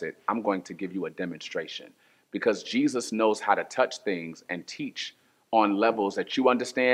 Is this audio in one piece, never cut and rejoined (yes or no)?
yes